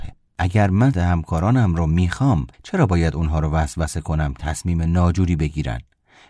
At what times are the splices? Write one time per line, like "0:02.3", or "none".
0:00.9
0:02.5
0:04.4